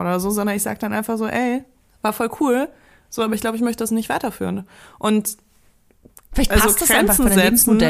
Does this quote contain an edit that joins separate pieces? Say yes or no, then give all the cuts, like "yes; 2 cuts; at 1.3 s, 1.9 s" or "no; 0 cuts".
no; 0 cuts